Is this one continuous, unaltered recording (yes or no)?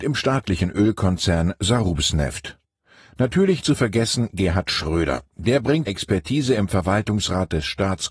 no